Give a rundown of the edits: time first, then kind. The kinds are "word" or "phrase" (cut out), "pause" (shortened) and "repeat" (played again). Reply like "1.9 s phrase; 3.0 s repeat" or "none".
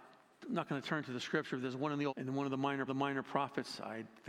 2.1 s phrase; 2.9 s repeat